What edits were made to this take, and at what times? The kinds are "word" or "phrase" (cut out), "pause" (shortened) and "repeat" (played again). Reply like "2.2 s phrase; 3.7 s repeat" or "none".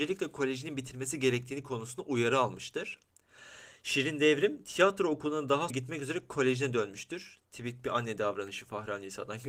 5.7 s word